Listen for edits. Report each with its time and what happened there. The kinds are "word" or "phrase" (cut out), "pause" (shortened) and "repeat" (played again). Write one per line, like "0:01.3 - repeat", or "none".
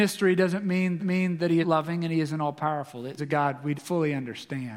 0:01.0 - repeat
0:01.6 - word
0:03.2 - phrase
0:03.7 - word